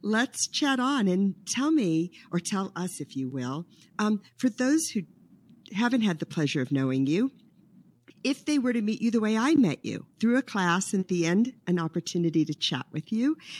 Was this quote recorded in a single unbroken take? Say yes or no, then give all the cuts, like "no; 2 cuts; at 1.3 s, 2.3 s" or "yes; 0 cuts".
no; 2 cuts; at 10.1 s, 11.0 s